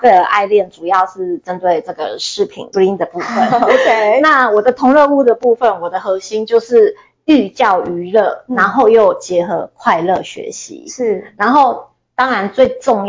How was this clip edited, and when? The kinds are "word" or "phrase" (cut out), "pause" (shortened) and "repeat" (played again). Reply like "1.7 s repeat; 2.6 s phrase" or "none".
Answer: 2.7 s word